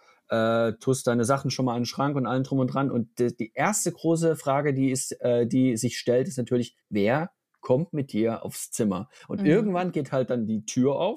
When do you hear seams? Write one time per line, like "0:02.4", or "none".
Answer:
0:06.8